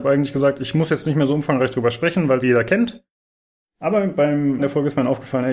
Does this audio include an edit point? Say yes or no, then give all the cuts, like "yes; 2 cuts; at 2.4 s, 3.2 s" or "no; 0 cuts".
yes; 2 cuts; at 2.4 s, 4.6 s